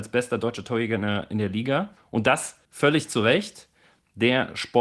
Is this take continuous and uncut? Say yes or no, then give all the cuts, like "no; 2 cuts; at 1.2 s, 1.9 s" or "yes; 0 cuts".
yes; 0 cuts